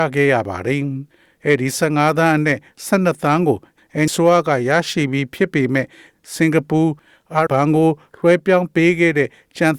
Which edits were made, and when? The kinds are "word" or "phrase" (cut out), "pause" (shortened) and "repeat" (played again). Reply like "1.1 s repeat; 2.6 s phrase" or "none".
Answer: 4.1 s word; 7.5 s word